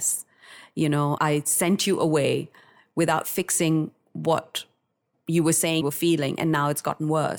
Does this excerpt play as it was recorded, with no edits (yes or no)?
no